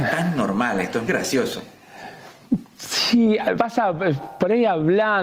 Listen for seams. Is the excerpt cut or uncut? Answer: cut